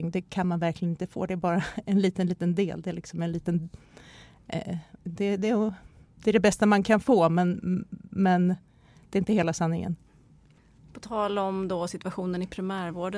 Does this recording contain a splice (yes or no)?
no